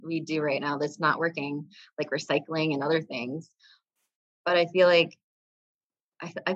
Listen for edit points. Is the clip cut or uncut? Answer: uncut